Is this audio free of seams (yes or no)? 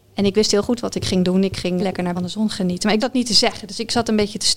no